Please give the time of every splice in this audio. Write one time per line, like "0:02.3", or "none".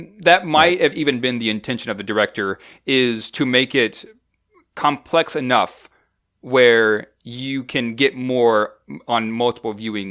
none